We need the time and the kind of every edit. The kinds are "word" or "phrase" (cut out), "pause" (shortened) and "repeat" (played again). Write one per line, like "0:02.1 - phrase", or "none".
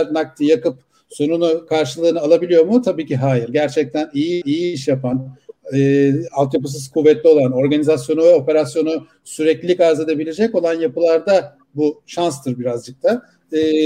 0:04.4 - repeat